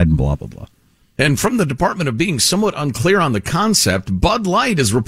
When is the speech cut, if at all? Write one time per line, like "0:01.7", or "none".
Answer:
none